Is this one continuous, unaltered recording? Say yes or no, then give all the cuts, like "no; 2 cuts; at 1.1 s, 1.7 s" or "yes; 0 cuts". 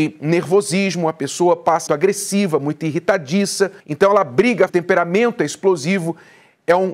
no; 3 cuts; at 1.9 s, 3.8 s, 4.7 s